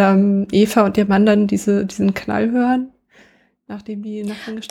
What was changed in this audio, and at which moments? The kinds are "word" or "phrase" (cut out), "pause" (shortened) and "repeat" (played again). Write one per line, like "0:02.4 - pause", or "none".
none